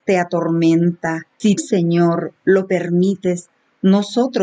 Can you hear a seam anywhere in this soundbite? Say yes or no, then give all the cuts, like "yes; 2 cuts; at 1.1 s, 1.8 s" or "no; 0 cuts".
yes; 2 cuts; at 1.6 s, 2.4 s